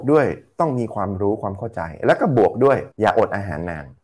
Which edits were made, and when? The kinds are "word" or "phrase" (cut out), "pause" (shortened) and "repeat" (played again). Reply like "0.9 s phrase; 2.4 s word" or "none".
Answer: 2.9 s pause